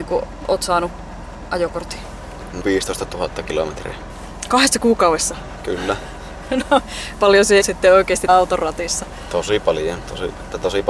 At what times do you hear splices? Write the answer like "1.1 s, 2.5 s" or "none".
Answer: 2.6 s, 7.2 s, 7.6 s, 8.3 s